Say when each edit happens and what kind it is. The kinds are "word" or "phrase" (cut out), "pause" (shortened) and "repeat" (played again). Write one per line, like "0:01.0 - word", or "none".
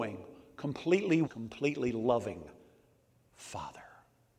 0:01.2 - word